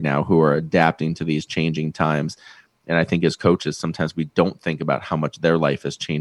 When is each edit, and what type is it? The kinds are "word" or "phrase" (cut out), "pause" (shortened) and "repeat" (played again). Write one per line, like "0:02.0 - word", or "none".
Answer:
none